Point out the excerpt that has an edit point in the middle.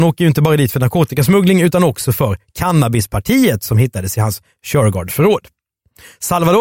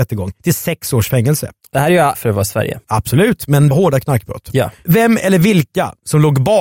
second; 3 cuts; at 2.1 s, 2.8 s, 3.7 s

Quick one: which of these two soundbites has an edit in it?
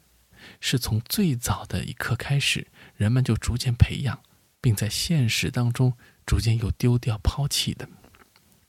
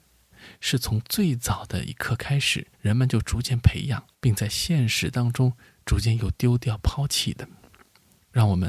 second; 2 cuts; at 2.7 s, 4.1 s

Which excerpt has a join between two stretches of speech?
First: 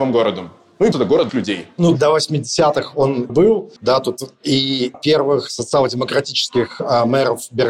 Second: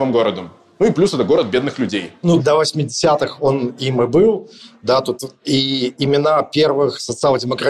first; 5 cuts; at 0.9 s, 1.3 s, 3.3 s, 3.8 s, 4.9 s

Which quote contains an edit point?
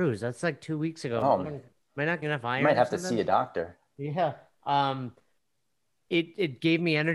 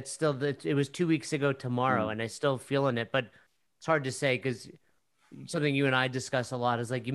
first; 2 cuts; at 1.4 s, 2.2 s

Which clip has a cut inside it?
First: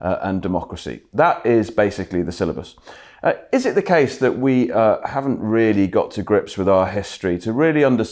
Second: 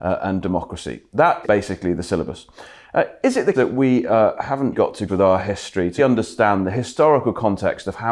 second; 5 cuts; at 1.4 s, 3.5 s, 4.7 s, 5.1 s, 6.0 s

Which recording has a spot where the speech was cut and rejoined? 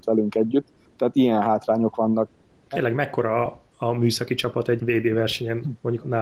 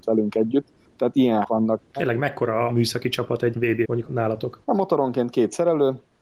second; 5 cuts; at 1.4 s, 1.9 s, 2.7 s, 3.8 s, 4.6 s

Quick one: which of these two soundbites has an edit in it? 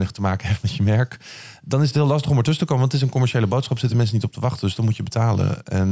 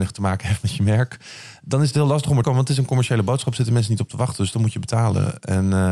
second; 1 cut; at 2.4 s

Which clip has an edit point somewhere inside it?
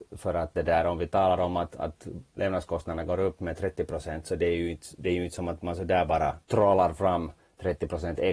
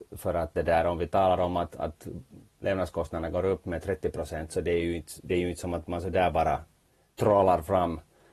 first; 3 cuts; at 2.3 s, 6.4 s, 7.4 s

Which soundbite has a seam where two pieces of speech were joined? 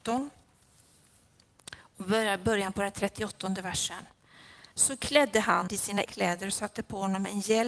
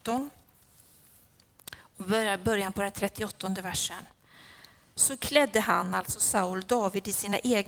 first; 3 cuts; at 4.7 s, 5.7 s, 6.1 s

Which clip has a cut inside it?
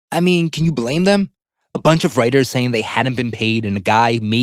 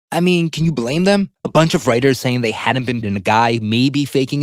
second; 2 cuts; at 1.4 s, 3.0 s

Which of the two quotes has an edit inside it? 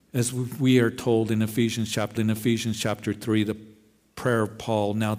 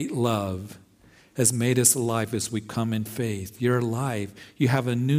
first; 1 cut; at 2.2 s

